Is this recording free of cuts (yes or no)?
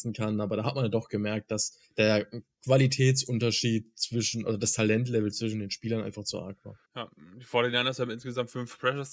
no